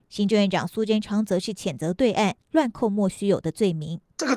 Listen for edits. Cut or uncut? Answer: cut